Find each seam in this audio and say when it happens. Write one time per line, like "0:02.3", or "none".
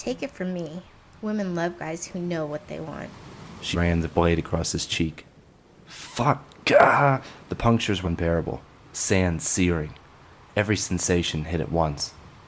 0:03.7
0:07.4
0:08.0

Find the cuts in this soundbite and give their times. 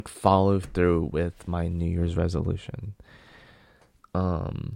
none

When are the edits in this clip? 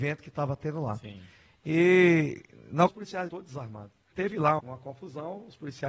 0:02.9
0:03.3
0:04.1
0:04.6

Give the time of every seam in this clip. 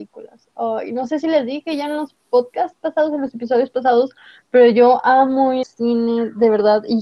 0:05.6

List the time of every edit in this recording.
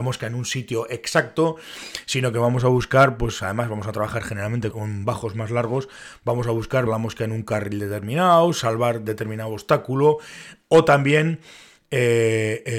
0:04.7
0:06.9

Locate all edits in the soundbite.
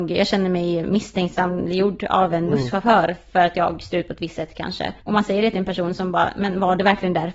0:05.0

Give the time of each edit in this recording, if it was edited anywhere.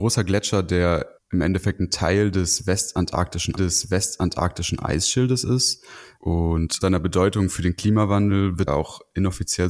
0:01.2
0:03.6
0:06.8
0:08.7

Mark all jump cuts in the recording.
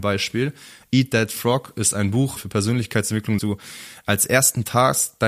0:02.4
0:03.4

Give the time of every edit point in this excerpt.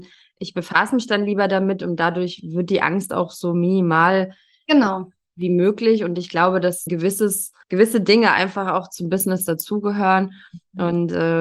0:06.9
0:07.6

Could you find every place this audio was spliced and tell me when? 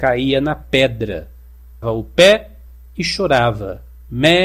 0:01.8

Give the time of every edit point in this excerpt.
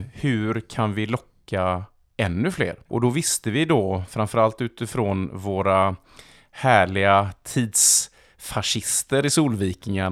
0:02.8

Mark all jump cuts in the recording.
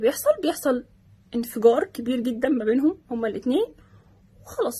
none

